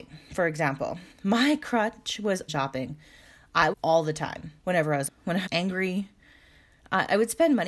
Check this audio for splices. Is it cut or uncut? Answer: cut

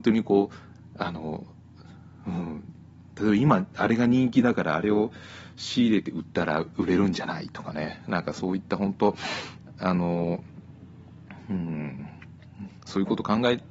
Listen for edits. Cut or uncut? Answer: cut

